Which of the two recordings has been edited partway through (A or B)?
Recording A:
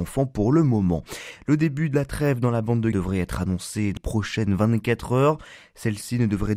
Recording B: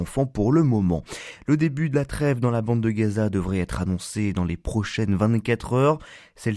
A